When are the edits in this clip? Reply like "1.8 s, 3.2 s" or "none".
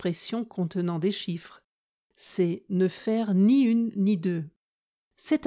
none